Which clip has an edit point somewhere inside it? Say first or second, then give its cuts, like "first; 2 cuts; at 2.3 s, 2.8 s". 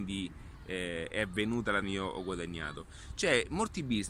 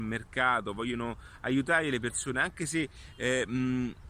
first; 1 cut; at 1.8 s